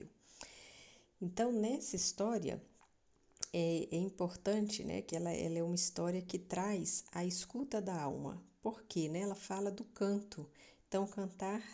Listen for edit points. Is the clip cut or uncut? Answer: uncut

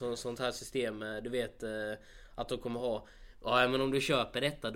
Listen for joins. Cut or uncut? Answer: uncut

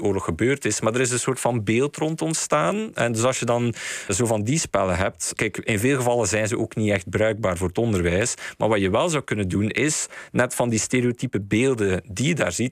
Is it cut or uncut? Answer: cut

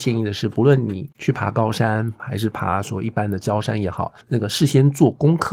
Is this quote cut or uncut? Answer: cut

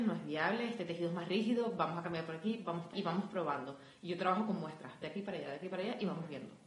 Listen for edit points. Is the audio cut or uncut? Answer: cut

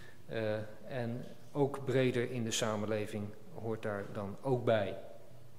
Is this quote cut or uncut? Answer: uncut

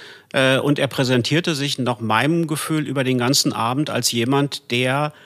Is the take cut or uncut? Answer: uncut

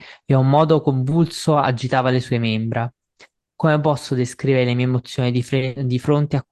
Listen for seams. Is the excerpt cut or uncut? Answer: uncut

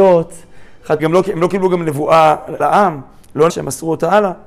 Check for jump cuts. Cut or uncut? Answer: cut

